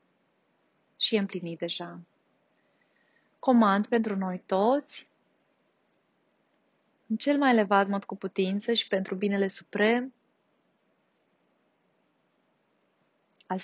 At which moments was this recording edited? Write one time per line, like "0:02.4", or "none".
none